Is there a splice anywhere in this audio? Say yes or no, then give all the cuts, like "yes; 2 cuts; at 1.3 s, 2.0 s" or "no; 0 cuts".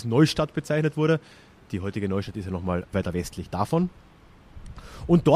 yes; 1 cut; at 2.9 s